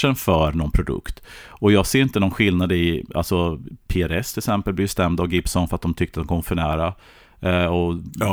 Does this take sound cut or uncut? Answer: uncut